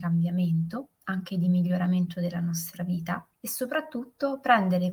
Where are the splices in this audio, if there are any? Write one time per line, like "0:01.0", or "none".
0:00.9
0:03.3